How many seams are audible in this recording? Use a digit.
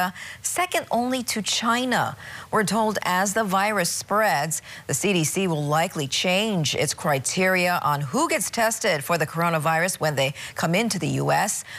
0